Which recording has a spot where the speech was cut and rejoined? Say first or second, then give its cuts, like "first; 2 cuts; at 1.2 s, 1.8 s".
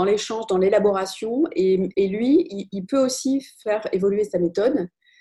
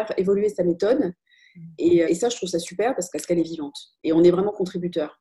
second; 2 cuts; at 2.0 s, 3.1 s